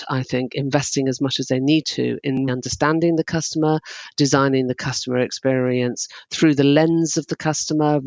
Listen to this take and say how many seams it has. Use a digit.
1